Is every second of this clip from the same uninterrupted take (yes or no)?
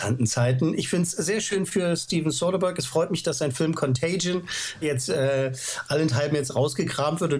no